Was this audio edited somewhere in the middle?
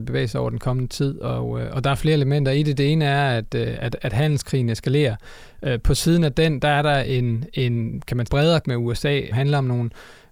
yes; 3 cuts; at 8.3 s, 8.6 s, 9.3 s

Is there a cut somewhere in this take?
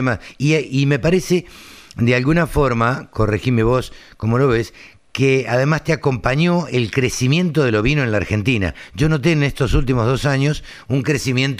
no; 0 cuts

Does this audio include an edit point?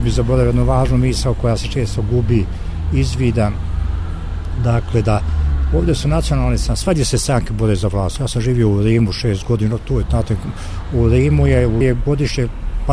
yes; 1 cut; at 11.8 s

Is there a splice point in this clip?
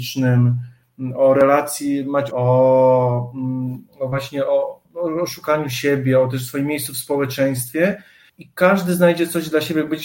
yes; 4 cuts; at 2.3 s, 3.9 s, 4.8 s, 8.3 s

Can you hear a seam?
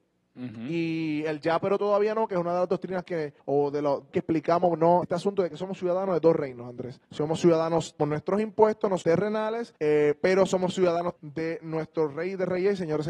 yes; 8 cuts; at 3.4 s, 4.1 s, 5.0 s, 7.0 s, 8.0 s, 9.0 s, 9.8 s, 11.2 s

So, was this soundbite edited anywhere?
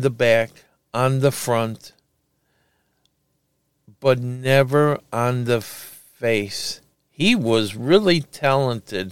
no; 0 cuts

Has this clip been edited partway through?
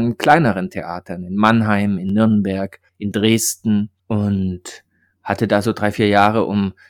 yes; 2 cuts; at 2.9 s, 4.0 s

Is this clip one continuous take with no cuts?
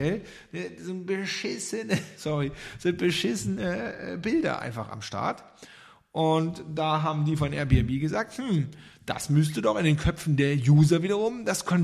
yes; 0 cuts

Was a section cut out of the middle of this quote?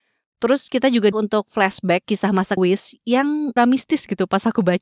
yes; 4 cuts; at 1.1 s, 2.0 s, 2.6 s, 3.6 s

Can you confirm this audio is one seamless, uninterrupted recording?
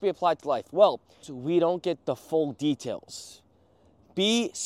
no; 1 cut; at 1.2 s

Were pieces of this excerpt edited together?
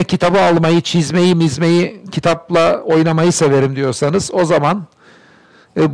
no; 0 cuts

